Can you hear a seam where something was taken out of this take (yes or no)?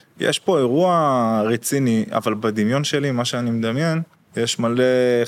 yes